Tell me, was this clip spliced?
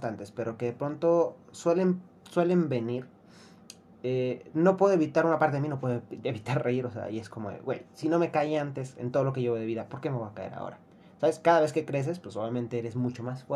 no; 0 cuts

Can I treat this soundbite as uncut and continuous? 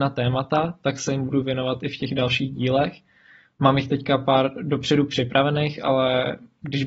yes; 0 cuts

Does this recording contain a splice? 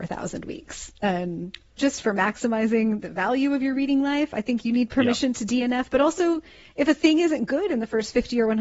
yes; 1 cut; at 1.8 s

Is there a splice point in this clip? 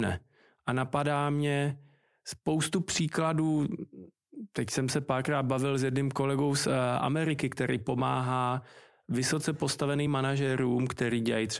no; 0 cuts

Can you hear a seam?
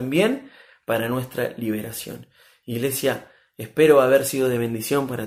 no; 0 cuts

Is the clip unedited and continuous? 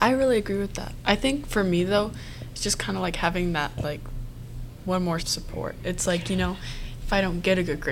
no; 1 cut; at 5.2 s

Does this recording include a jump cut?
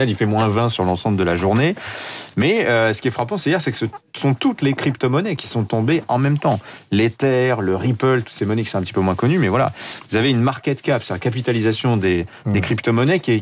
no; 0 cuts

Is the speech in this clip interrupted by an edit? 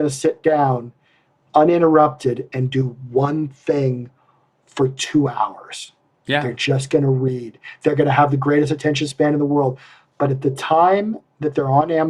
no; 0 cuts

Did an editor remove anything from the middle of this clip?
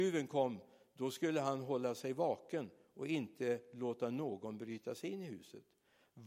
no; 0 cuts

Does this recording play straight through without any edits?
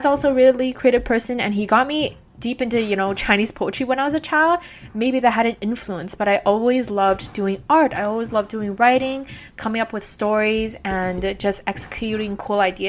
yes; 0 cuts

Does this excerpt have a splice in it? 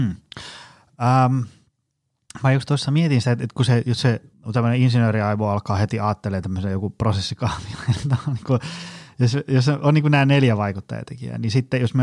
yes; 1 cut; at 4.3 s

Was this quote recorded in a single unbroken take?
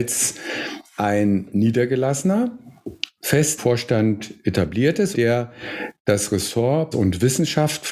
no; 4 cuts; at 3.2 s, 3.6 s, 5.1 s, 6.9 s

